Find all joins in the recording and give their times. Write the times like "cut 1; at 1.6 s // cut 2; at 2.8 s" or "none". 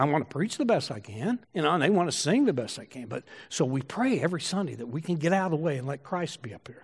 cut 1; at 1.4 s